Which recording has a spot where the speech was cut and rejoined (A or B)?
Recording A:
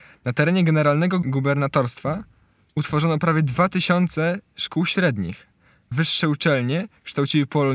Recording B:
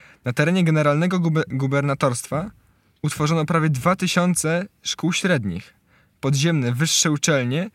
A